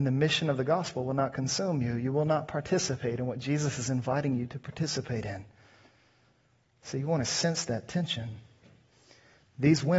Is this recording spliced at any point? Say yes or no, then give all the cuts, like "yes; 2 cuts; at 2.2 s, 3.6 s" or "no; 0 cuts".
no; 0 cuts